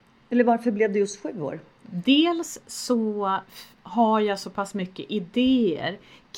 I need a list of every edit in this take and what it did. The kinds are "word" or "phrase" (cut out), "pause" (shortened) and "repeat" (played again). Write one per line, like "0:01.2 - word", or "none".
none